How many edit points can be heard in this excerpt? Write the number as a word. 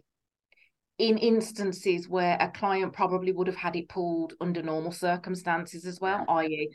zero